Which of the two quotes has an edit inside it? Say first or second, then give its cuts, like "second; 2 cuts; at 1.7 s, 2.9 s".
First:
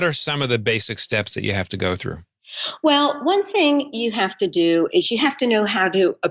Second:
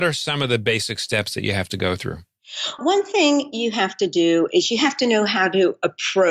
second; 1 cut; at 2.8 s